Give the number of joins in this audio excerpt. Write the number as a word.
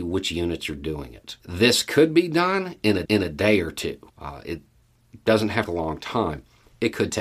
four